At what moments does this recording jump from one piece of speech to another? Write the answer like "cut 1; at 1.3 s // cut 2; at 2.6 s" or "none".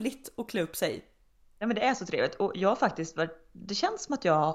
none

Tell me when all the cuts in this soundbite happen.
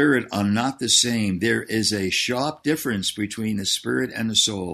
none

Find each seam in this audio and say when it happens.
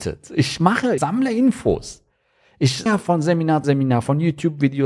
cut 1; at 1.0 s // cut 2; at 2.9 s // cut 3; at 3.6 s

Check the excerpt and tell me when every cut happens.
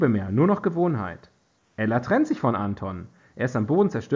none

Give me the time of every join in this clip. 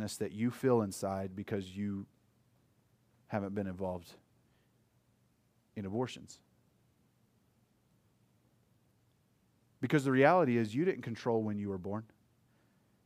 none

